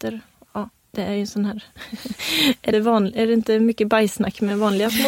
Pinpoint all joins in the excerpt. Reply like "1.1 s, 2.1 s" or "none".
2.7 s

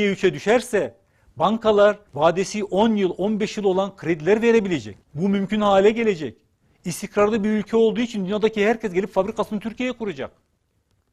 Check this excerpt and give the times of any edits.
2.1 s, 5.0 s, 6.6 s

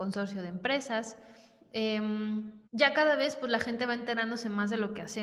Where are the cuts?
2.6 s

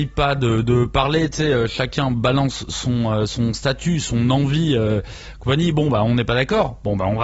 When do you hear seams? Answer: none

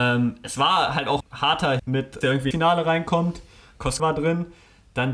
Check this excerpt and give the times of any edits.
1.2 s, 1.8 s, 2.2 s, 2.5 s, 4.0 s

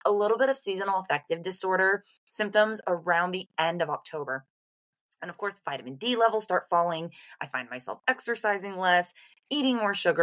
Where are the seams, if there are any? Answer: none

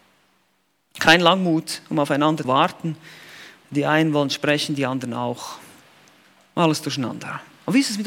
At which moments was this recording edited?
2.4 s

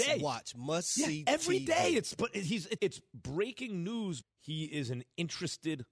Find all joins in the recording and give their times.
2.8 s, 4.2 s

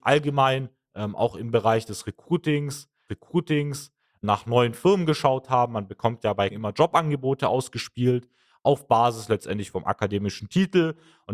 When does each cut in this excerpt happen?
3.1 s, 6.5 s

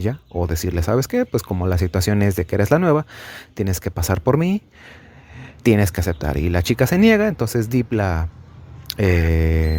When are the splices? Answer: none

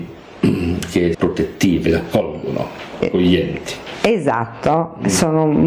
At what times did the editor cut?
1.1 s, 3.0 s

